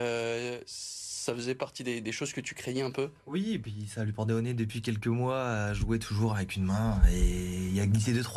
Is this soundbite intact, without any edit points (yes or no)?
no